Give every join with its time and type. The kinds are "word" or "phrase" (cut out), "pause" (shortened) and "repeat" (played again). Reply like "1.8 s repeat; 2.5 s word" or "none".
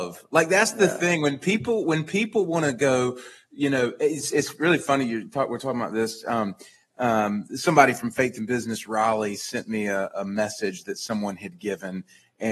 none